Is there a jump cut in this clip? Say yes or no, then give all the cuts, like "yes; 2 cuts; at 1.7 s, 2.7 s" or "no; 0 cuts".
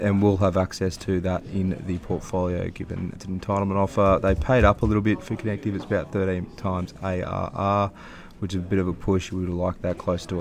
yes; 1 cut; at 3.2 s